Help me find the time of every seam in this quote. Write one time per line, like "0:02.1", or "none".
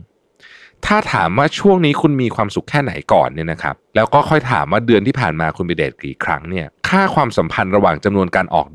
0:03.8
0:06.8